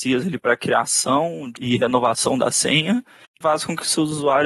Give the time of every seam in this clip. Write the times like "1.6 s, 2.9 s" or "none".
1.6 s, 3.4 s